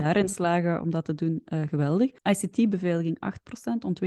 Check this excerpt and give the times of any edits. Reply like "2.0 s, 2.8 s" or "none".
2.2 s